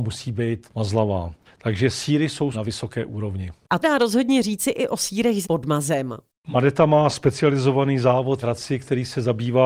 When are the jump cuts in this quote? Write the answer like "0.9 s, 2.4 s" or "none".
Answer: 1.5 s, 2.5 s, 3.8 s, 5.4 s, 8.4 s